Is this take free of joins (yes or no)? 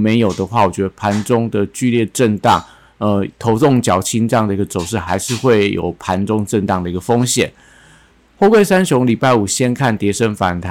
yes